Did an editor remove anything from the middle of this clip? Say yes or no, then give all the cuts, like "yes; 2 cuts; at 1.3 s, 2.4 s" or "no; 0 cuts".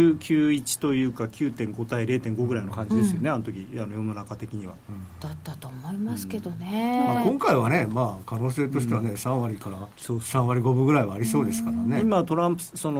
yes; 1 cut; at 9.9 s